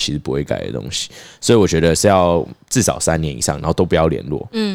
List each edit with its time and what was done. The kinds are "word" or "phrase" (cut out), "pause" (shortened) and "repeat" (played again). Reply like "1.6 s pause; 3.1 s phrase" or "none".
none